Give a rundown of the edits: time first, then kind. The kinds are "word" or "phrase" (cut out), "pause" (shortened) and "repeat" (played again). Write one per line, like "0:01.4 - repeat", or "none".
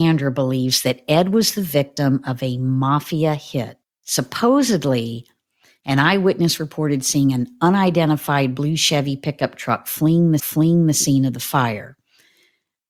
0:03.8 - pause
0:10.4 - repeat